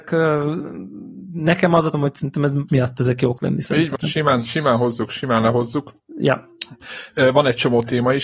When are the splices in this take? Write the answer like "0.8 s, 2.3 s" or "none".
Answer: 1.9 s, 2.7 s, 3.4 s, 3.9 s, 6.0 s